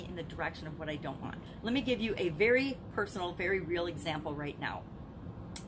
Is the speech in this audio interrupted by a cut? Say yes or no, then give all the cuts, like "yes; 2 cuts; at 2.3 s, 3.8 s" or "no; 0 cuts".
no; 0 cuts